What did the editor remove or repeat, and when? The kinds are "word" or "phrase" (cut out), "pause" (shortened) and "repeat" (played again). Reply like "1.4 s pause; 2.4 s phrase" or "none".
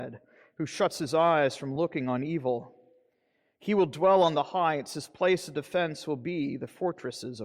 none